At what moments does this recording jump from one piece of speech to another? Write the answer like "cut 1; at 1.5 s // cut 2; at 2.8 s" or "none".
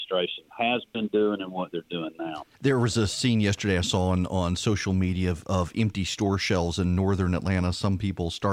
cut 1; at 2.5 s